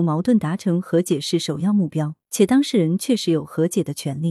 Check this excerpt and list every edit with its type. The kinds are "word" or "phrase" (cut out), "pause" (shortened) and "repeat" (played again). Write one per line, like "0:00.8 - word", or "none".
0:02.2 - pause